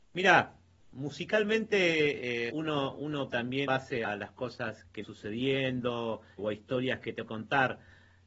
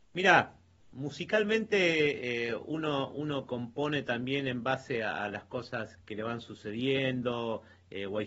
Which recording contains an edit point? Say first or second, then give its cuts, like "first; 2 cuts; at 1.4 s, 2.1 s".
first; 7 cuts; at 2.5 s, 3.3 s, 3.7 s, 4.0 s, 5.0 s, 6.4 s, 7.3 s